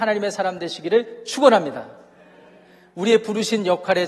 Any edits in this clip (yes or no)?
no